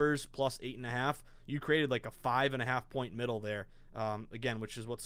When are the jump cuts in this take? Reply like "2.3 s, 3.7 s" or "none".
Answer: none